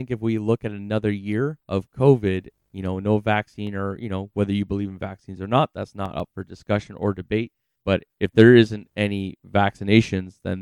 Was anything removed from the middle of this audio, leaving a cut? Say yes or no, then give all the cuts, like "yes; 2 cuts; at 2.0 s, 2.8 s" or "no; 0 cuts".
yes; 2 cuts; at 1.6 s, 7.8 s